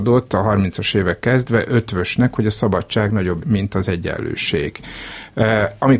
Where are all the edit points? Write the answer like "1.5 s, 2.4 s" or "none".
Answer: 1.2 s, 3.4 s